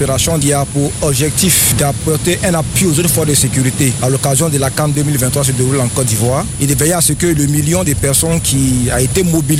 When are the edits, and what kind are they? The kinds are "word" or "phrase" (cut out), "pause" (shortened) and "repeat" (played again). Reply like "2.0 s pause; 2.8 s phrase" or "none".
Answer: none

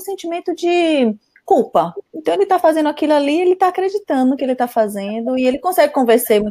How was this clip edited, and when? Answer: 2.1 s pause

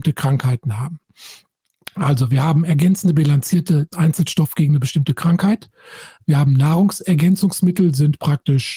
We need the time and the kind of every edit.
3.9 s phrase

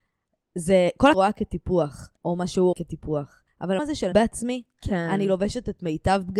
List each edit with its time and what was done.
1.1 s phrase; 2.2 s pause; 2.7 s word; 3.8 s word; 4.1 s phrase

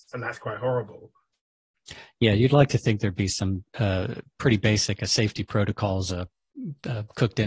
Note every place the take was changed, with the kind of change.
none

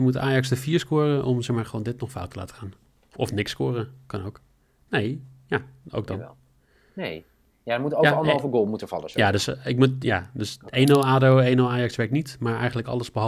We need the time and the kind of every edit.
none

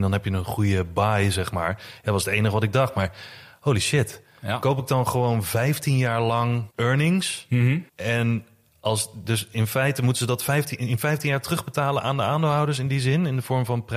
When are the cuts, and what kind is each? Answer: 6.7 s pause; 7.9 s pause

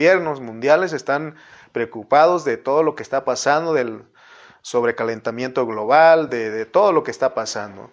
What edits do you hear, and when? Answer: none

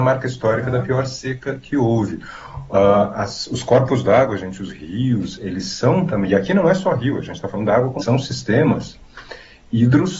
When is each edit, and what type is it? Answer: 8.0 s phrase

